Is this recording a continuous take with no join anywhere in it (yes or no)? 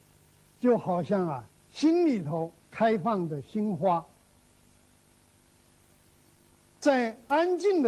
no